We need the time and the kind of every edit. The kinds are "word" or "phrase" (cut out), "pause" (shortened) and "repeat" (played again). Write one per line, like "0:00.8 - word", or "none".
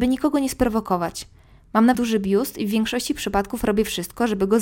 0:01.9 - word